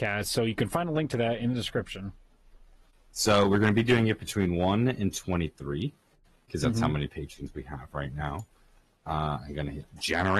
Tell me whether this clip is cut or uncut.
uncut